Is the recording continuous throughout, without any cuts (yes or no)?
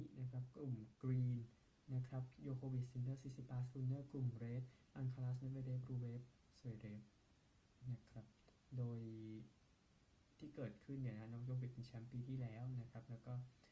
yes